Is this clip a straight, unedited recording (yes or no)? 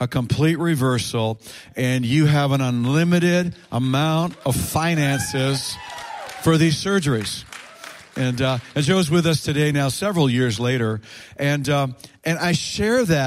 yes